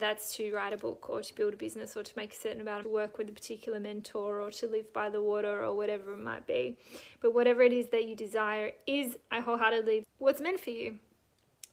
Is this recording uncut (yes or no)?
no